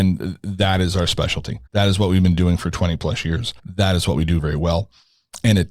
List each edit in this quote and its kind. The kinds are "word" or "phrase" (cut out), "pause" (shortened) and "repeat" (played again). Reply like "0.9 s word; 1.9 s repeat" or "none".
1.7 s pause; 3.6 s pause